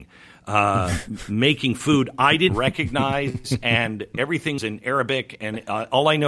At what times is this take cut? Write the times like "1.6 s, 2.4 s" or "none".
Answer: 2.5 s, 4.6 s